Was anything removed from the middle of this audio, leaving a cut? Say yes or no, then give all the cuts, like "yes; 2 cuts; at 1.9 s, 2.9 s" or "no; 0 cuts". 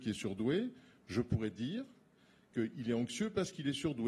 no; 0 cuts